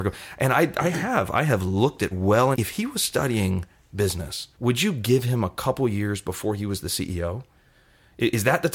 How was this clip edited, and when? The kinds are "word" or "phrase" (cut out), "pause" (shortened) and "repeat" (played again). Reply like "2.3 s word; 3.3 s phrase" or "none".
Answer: 2.1 s word; 2.5 s phrase; 4.5 s pause